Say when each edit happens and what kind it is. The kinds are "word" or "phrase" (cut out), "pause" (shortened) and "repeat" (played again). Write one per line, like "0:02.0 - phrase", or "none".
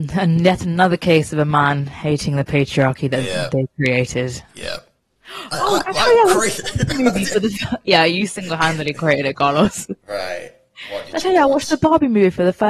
0:04.5 - pause

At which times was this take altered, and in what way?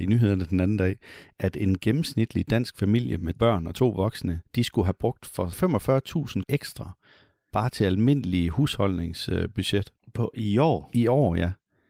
0:03.3 - word
0:04.5 - pause
0:06.4 - word

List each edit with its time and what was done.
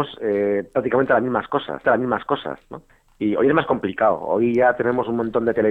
0:01.8 - repeat

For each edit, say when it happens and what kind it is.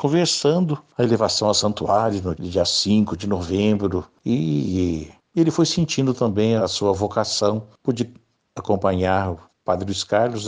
0:02.3 - word
0:06.6 - word

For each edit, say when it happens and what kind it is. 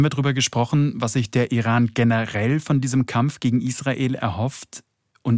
none

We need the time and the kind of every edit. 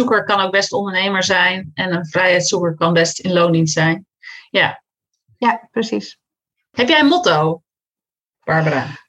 none

